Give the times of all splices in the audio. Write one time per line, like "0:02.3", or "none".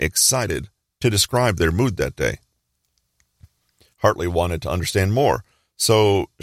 none